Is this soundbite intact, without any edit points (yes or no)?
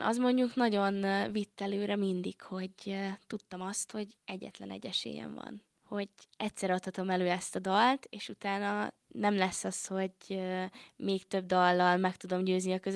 no